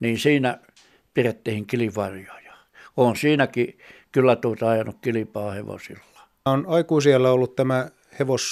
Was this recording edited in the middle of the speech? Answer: yes; 1 cut; at 6.5 s

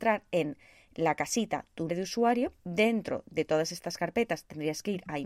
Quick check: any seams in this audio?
yes; 2 cuts; at 1.9 s, 2.6 s

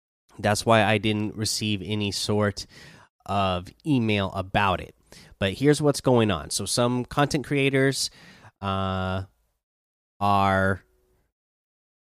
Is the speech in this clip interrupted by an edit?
no; 0 cuts

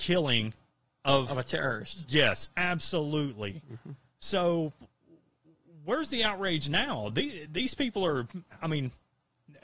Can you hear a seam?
no; 0 cuts

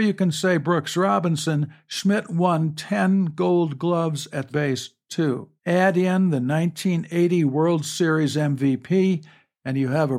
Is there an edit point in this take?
yes; 2 cuts; at 4.5 s, 5.6 s

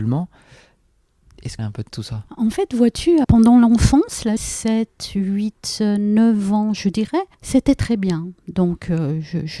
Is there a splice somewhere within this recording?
yes; 6 cuts; at 1.6 s, 2.3 s, 3.2 s, 4.4 s, 7.3 s, 8.4 s

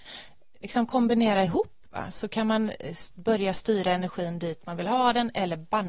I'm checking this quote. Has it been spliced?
no; 0 cuts

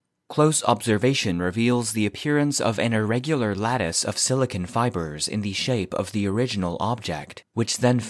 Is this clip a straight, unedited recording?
yes; 0 cuts

